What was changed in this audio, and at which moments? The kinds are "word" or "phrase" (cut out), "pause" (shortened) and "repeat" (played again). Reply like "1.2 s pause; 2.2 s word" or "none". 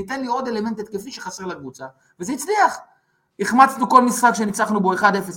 none